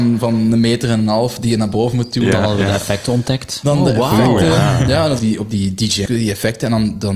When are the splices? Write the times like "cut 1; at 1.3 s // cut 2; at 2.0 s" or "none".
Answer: cut 1; at 5.2 s // cut 2; at 6.1 s